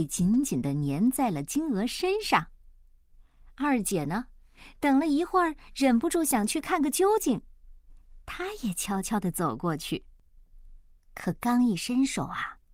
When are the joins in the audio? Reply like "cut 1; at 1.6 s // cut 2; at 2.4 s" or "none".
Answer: none